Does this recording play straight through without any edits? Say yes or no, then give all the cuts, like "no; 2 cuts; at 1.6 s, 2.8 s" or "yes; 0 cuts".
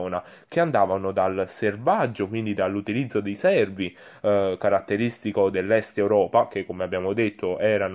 yes; 0 cuts